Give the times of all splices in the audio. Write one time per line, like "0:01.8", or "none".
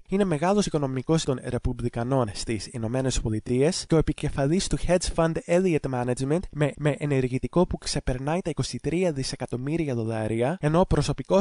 0:01.2
0:06.7